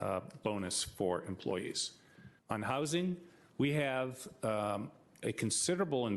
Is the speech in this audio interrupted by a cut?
yes; 1 cut; at 2.4 s

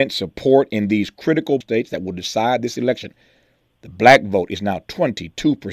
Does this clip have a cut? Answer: yes; 1 cut; at 1.6 s

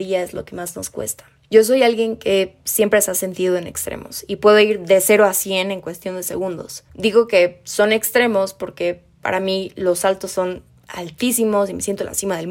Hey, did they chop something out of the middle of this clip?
no; 0 cuts

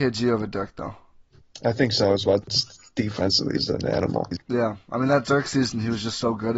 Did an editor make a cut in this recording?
yes; 1 cut; at 4.4 s

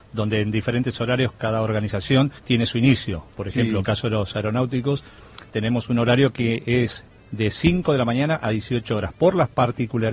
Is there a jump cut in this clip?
yes; 3 cuts; at 1.3 s, 2.4 s, 7.1 s

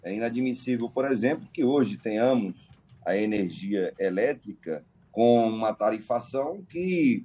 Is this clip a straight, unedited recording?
yes; 0 cuts

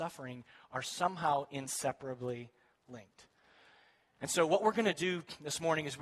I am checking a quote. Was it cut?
no; 0 cuts

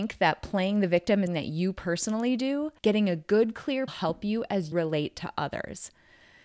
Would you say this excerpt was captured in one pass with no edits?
no; 4 cuts; at 1.3 s, 2.8 s, 3.9 s, 4.7 s

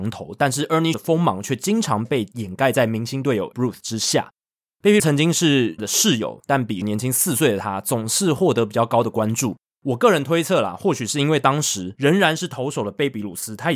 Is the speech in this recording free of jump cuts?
no; 5 cuts; at 0.9 s, 3.5 s, 5.0 s, 5.8 s, 6.8 s

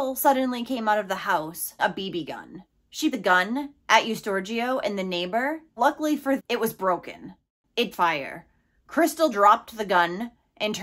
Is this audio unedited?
no; 6 cuts; at 1.8 s, 3.1 s, 5.8 s, 6.4 s, 7.9 s, 9.3 s

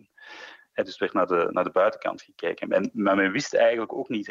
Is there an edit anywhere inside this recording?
no; 0 cuts

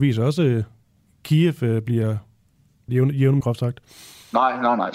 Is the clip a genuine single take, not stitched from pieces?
no; 2 cuts; at 2.9 s, 3.4 s

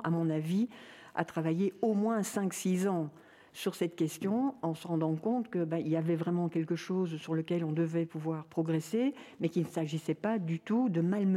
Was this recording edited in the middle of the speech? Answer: no; 0 cuts

